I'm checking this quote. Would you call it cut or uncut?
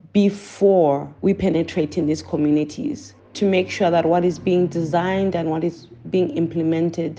cut